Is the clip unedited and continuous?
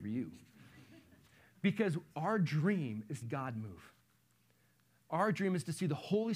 no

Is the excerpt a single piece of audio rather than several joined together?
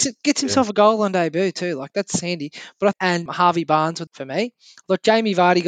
no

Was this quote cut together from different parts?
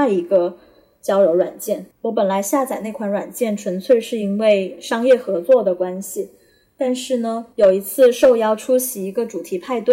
yes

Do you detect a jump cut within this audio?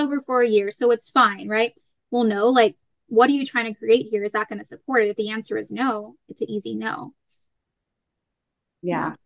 no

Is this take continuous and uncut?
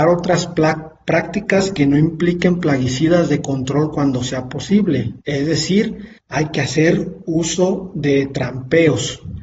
no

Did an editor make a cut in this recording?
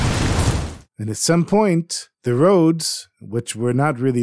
no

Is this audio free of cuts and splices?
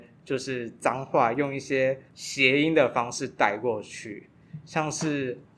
no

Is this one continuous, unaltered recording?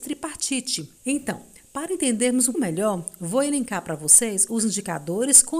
no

